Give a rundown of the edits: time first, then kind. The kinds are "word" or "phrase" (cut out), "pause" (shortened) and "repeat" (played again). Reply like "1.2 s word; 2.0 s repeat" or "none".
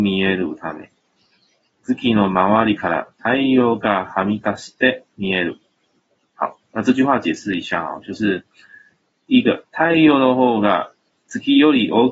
none

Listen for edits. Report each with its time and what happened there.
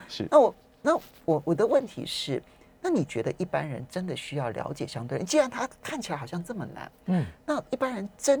none

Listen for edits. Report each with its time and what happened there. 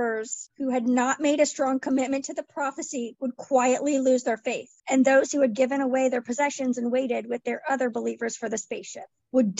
4.8 s pause

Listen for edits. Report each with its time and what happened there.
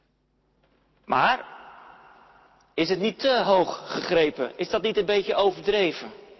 none

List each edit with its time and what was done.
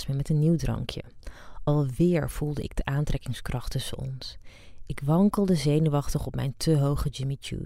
none

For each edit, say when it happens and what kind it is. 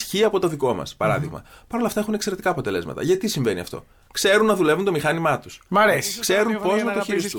none

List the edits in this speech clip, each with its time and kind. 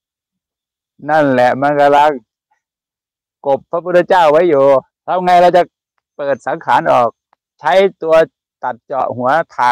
4.9 s pause

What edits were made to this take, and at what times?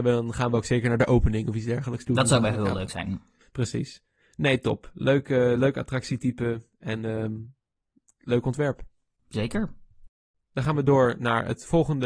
none

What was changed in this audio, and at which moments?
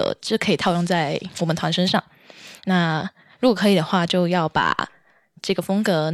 none

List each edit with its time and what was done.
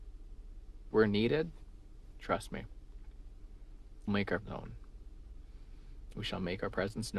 0.9 s word; 4.1 s word; 4.4 s word

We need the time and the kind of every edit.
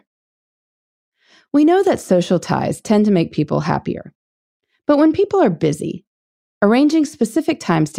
none

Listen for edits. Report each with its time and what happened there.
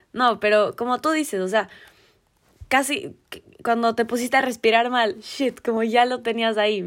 none

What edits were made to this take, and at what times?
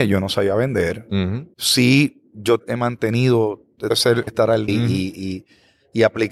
1.5 s pause; 2.6 s phrase; 3.9 s word; 4.3 s word; 4.7 s word

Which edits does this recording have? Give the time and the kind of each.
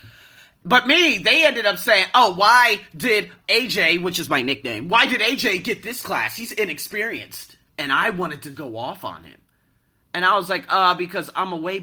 3.4 s word; 7.7 s pause; 8.5 s word

